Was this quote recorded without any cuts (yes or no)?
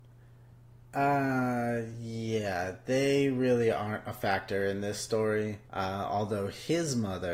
no